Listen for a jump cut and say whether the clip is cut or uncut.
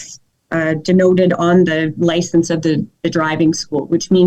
uncut